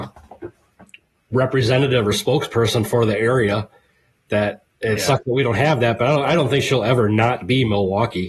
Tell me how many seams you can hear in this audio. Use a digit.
1